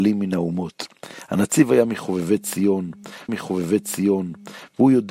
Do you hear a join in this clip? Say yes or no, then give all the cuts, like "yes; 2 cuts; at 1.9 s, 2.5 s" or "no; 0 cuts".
yes; 1 cut; at 3.3 s